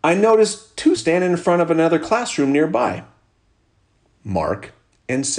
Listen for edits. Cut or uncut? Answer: cut